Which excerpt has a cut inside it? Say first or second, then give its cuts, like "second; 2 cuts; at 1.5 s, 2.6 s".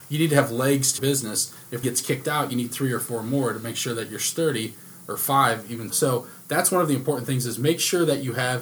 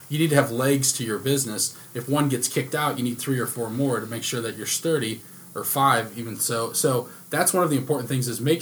first; 3 cuts; at 1.0 s, 1.8 s, 5.9 s